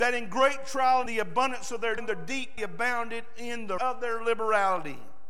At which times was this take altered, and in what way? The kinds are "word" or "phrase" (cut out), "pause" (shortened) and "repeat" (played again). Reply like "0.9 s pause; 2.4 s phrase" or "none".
1.1 s word; 2.0 s word; 2.6 s word; 3.8 s word